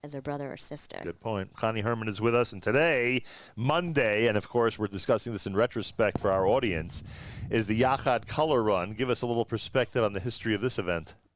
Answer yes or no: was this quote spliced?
no